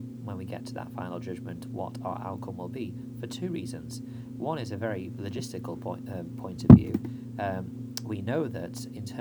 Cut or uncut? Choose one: uncut